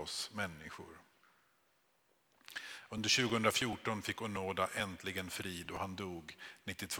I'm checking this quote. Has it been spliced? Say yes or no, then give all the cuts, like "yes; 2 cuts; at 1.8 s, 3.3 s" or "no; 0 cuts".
no; 0 cuts